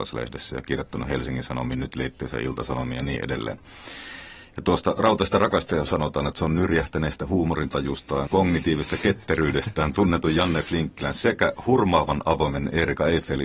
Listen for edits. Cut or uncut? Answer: cut